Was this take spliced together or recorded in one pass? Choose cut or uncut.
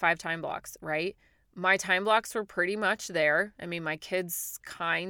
uncut